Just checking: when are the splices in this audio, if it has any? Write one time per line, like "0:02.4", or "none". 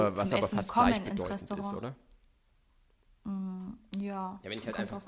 0:02.7